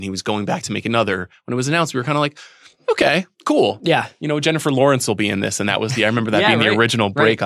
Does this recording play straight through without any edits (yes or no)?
no